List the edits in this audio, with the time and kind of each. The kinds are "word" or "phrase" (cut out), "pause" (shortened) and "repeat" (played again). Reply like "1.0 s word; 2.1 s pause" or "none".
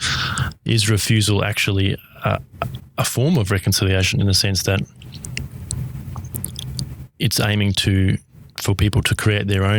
none